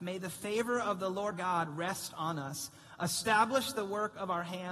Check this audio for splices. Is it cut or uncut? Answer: cut